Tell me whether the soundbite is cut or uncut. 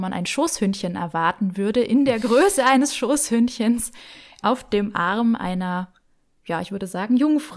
uncut